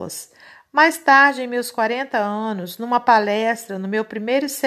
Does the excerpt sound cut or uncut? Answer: uncut